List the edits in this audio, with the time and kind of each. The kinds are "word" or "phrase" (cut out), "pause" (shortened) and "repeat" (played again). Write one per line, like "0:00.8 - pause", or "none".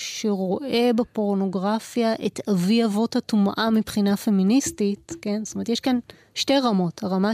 none